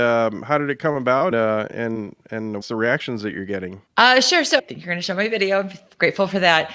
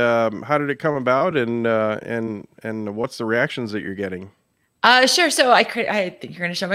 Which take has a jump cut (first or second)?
first